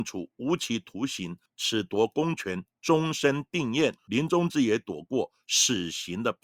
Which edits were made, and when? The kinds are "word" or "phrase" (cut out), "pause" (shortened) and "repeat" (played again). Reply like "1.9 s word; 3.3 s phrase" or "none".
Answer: 1.5 s pause; 4.0 s pause